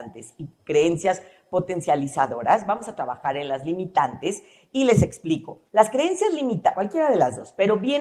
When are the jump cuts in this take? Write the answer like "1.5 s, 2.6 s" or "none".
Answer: 5.7 s, 6.7 s